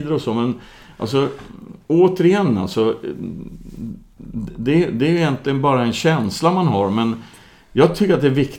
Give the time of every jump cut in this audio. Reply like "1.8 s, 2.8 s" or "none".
none